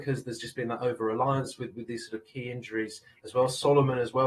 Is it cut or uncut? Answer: uncut